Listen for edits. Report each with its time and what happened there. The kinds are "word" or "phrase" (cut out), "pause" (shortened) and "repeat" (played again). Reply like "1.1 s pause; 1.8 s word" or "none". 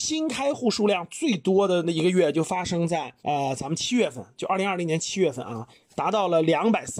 3.2 s pause